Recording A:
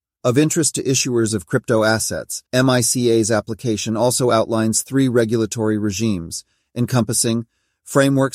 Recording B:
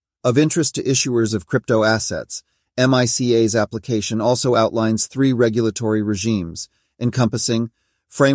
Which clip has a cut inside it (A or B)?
A